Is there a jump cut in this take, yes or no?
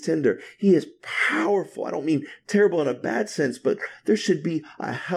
no